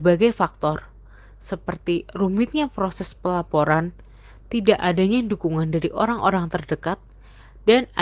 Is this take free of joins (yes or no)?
yes